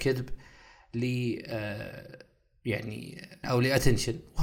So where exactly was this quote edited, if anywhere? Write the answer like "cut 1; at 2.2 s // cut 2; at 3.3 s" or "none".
cut 1; at 3.4 s